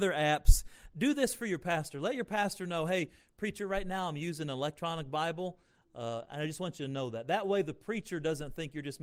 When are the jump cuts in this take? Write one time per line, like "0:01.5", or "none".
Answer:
none